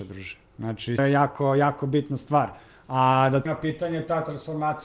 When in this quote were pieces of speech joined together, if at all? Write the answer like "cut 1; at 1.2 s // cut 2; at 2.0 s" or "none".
cut 1; at 1.0 s // cut 2; at 3.5 s